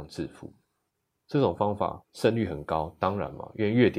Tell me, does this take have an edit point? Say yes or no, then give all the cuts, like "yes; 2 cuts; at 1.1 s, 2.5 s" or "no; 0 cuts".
yes; 1 cut; at 2.0 s